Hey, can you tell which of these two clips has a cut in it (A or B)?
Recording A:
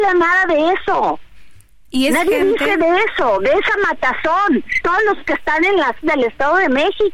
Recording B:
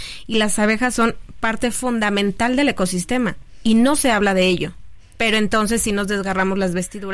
A